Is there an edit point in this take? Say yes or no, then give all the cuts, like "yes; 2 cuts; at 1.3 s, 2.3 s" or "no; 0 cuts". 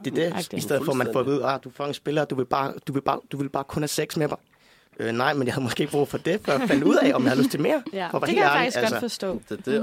no; 0 cuts